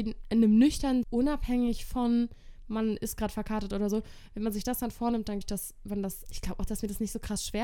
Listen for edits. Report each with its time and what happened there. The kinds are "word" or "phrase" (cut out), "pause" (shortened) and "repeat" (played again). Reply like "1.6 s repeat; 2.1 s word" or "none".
1.0 s word; 5.4 s word; 6.3 s word

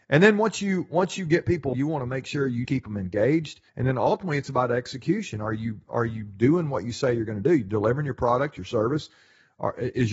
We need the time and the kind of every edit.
1.7 s word; 2.6 s word; 3.7 s pause

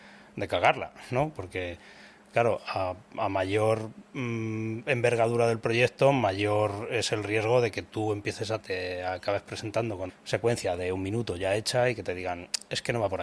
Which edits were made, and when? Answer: 8.6 s phrase; 10.1 s word

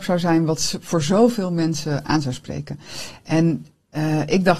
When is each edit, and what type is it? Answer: none

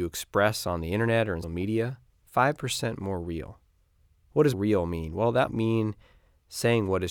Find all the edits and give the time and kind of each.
1.4 s word; 4.0 s pause; 4.5 s word; 5.5 s word

